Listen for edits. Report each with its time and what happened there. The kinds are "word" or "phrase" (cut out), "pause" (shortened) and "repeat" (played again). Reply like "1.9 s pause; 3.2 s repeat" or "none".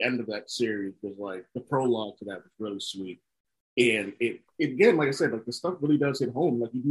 none